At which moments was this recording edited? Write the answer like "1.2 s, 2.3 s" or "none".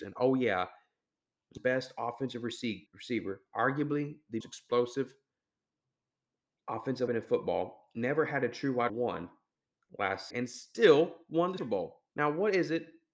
1.6 s, 2.9 s, 4.4 s, 7.1 s, 8.9 s, 10.3 s, 11.6 s, 12.1 s